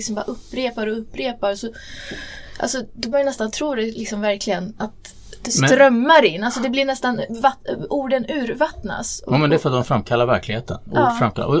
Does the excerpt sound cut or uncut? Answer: cut